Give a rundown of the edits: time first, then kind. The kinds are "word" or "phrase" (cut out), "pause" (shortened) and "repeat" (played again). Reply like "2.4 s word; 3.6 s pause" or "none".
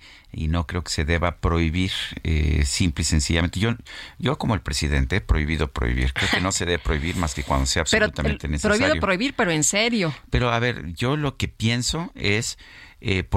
none